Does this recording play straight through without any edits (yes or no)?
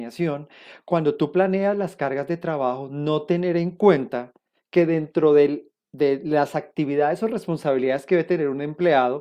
yes